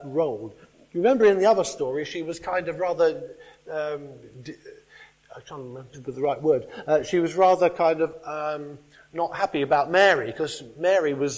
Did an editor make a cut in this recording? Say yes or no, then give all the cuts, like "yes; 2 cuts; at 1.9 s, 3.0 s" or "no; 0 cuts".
no; 0 cuts